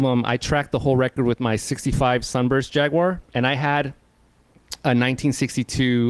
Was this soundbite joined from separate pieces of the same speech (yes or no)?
no